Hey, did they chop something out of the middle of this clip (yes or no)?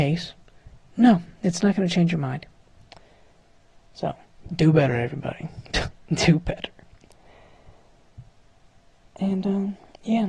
no